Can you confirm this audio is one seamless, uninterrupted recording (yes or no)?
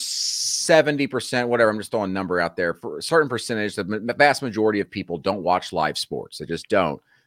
yes